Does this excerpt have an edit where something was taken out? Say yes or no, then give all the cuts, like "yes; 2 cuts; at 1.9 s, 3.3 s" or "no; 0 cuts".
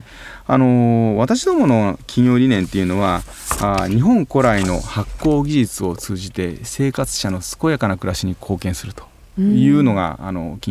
no; 0 cuts